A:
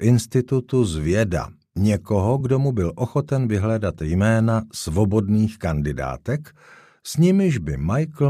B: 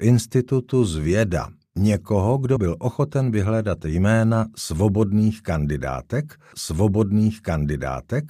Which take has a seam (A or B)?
B